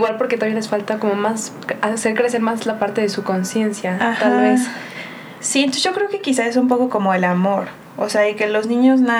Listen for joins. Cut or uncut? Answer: uncut